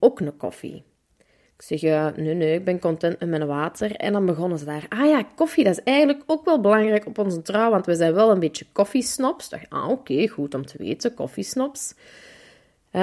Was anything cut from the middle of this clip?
no; 0 cuts

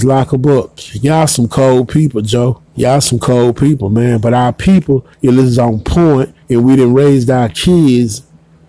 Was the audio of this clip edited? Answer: yes; 3 cuts; at 2.7 s, 5.1 s, 6.4 s

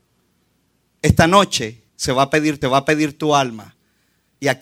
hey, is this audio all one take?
no; 2 cuts; at 1.9 s, 2.6 s

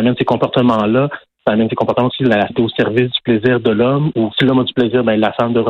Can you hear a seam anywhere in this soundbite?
yes; 3 cuts; at 2.1 s, 2.5 s, 4.3 s

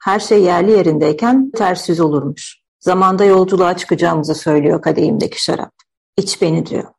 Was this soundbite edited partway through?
yes; 2 cuts; at 1.5 s, 2.7 s

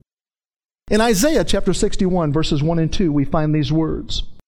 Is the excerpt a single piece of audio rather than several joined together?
yes; 0 cuts

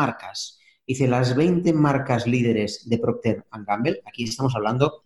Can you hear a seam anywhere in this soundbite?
no; 0 cuts

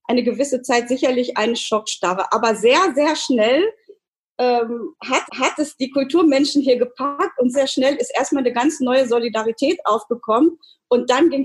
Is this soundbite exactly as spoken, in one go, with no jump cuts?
no; 2 cuts; at 5.3 s, 7.5 s

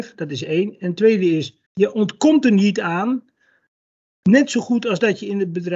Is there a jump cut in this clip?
yes; 1 cut; at 1.7 s

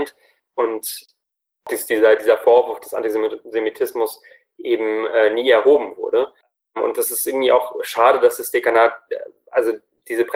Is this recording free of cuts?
yes; 0 cuts

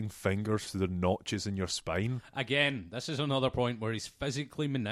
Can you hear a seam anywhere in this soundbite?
no; 0 cuts

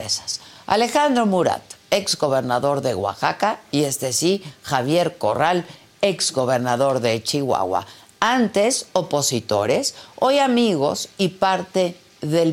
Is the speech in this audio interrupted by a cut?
no; 0 cuts

